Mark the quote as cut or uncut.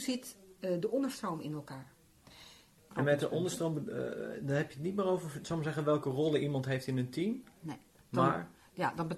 uncut